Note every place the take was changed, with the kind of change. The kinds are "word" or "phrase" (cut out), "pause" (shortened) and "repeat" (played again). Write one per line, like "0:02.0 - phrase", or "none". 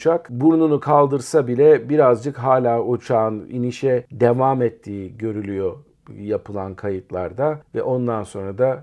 none